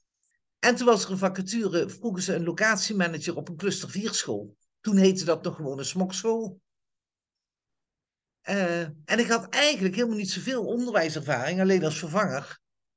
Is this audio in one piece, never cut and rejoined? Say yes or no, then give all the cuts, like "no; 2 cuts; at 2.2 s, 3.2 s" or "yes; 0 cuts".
yes; 0 cuts